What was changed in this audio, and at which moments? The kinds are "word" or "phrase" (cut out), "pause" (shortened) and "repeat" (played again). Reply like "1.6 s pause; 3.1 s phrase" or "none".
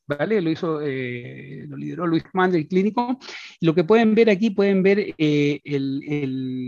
2.2 s word

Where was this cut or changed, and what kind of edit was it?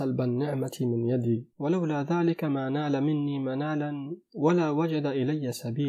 1.5 s pause

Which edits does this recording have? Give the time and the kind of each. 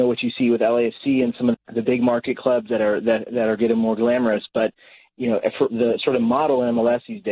1.5 s word; 5.7 s word

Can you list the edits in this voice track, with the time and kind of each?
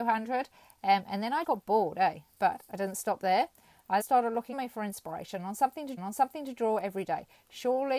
1.4 s word; 4.0 s word; 4.5 s word; 6.0 s repeat

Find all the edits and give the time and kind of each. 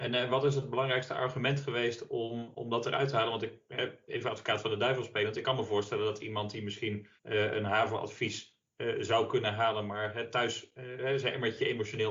4.1 s word; 7.2 s pause

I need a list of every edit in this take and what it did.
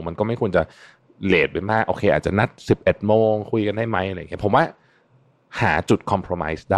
none

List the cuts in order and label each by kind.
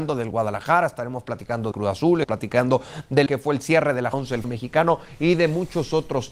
1.7 s word; 2.2 s word; 3.3 s word; 4.1 s word; 4.4 s word

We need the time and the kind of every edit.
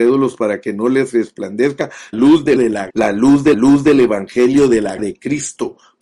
2.1 s word; 2.6 s word; 2.9 s word; 3.5 s repeat; 5.0 s word

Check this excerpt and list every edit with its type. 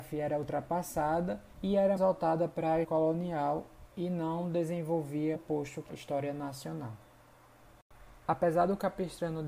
1.5 s pause; 2.0 s word; 2.8 s word; 3.9 s pause; 5.3 s word; 5.9 s word; 8.2 s pause

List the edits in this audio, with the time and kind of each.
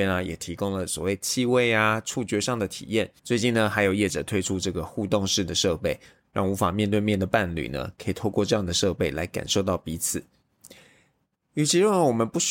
3.2 s pause

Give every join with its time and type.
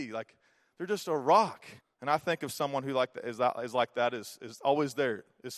1.8 s pause

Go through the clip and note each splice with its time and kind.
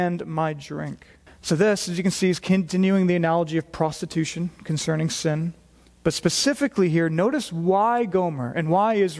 1.3 s pause

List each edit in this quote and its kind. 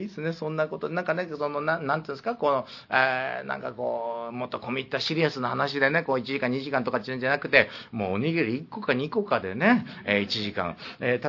none

